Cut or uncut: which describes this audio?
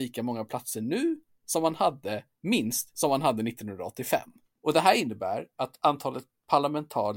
uncut